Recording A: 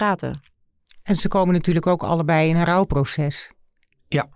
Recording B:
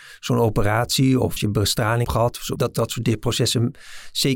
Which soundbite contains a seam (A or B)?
B